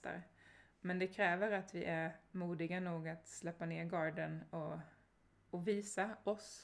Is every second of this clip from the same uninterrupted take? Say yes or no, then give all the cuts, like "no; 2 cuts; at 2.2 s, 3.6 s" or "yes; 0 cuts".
yes; 0 cuts